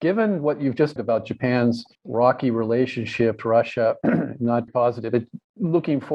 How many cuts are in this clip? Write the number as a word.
four